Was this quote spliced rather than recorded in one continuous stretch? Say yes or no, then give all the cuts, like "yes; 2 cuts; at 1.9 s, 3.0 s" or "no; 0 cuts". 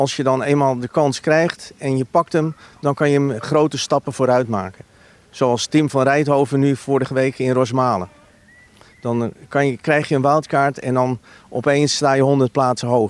no; 0 cuts